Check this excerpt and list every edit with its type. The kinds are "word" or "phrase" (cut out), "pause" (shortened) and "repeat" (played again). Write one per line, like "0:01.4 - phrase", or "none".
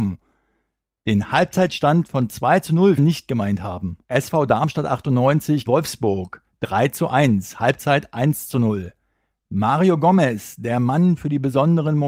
0:03.0 - phrase
0:04.0 - pause
0:05.7 - phrase